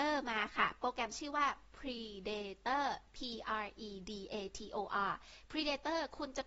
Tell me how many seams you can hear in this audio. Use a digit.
0